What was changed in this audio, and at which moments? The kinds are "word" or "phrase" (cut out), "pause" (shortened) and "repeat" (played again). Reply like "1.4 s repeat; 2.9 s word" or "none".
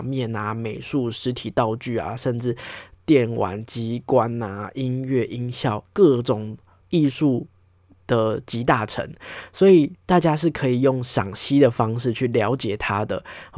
none